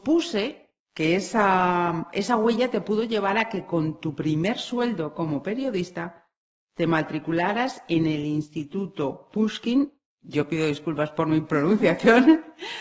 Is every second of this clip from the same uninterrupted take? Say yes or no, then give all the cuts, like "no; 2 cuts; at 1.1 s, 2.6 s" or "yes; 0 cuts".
yes; 0 cuts